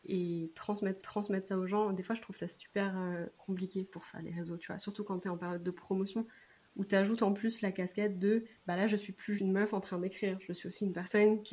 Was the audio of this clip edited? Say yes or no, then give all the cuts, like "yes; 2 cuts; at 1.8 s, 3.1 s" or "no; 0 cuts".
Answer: yes; 3 cuts; at 1.0 s, 8.6 s, 9.4 s